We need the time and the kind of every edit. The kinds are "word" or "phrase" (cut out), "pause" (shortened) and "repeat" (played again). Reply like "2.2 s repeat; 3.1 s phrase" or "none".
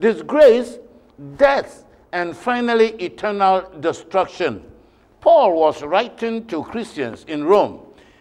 none